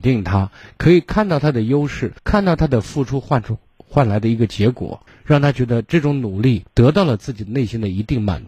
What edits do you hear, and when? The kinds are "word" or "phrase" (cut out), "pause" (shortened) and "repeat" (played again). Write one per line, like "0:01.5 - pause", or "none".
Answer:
0:02.2 - pause
0:05.1 - pause
0:06.7 - pause